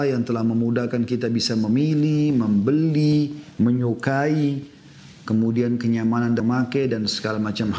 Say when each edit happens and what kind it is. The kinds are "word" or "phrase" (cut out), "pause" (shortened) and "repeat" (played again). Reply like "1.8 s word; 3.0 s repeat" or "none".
3.6 s word; 6.4 s word